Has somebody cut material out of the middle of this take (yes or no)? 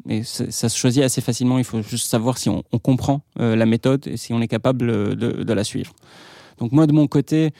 no